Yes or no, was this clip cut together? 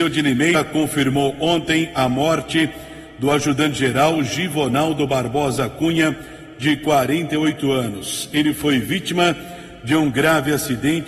no